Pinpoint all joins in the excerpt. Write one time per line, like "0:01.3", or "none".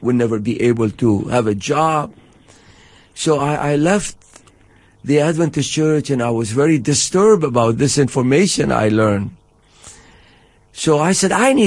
none